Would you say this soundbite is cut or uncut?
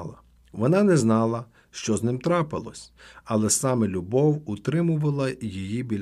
uncut